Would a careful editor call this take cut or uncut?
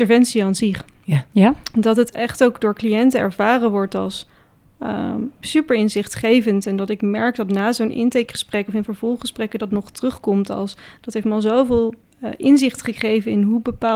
uncut